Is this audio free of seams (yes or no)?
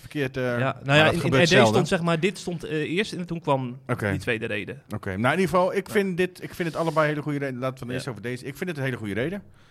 no